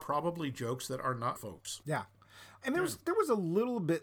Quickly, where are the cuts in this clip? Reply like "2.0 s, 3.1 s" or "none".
1.4 s, 2.6 s